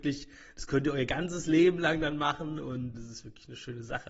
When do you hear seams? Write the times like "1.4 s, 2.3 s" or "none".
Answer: 2.9 s